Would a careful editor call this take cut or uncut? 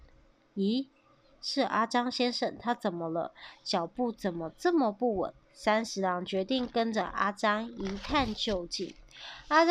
cut